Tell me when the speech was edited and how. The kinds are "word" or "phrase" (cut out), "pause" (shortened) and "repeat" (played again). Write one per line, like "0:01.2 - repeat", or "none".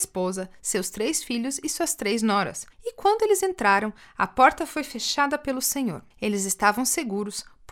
0:02.7 - pause
0:06.1 - pause